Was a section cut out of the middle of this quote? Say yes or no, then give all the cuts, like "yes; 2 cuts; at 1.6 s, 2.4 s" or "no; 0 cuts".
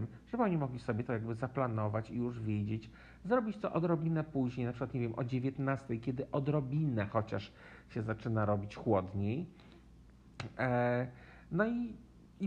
yes; 1 cut; at 10.1 s